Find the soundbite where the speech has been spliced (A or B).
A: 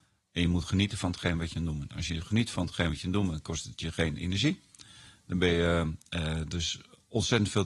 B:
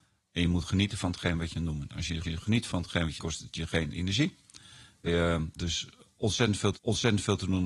B